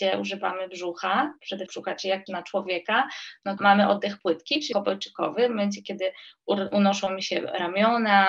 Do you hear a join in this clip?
yes; 4 cuts; at 1.7 s, 2.3 s, 3.6 s, 4.7 s

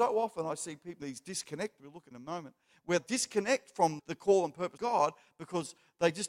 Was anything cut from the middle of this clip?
yes; 6 cuts; at 1.0 s, 1.8 s, 2.1 s, 3.0 s, 4.0 s, 4.8 s

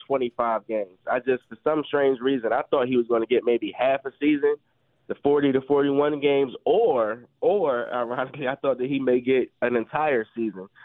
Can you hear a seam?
no; 0 cuts

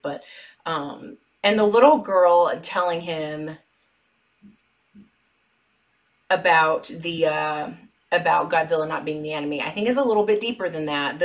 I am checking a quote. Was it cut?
no; 0 cuts

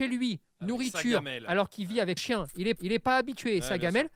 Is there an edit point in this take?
yes; 2 cuts; at 2.2 s, 2.8 s

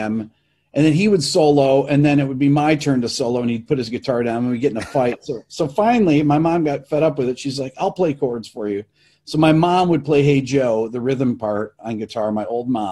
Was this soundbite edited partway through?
no; 0 cuts

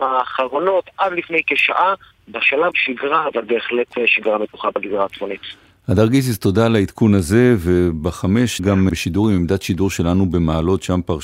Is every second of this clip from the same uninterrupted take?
no; 3 cuts; at 2.7 s, 8.6 s, 8.9 s

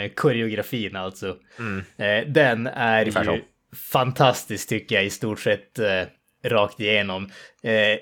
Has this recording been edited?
no; 0 cuts

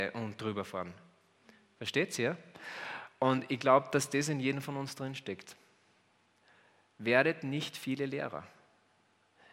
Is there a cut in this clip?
no; 0 cuts

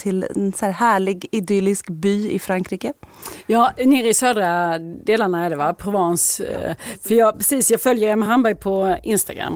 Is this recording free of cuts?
yes; 0 cuts

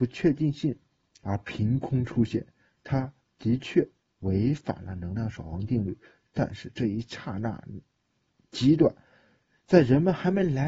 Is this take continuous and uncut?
yes; 0 cuts

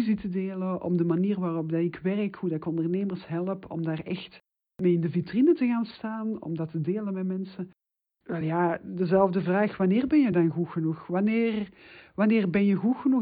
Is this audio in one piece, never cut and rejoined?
yes; 0 cuts

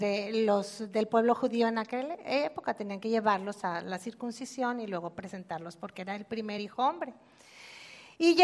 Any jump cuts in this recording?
no; 0 cuts

